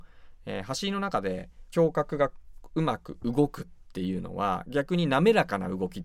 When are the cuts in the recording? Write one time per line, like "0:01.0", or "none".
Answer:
0:01.7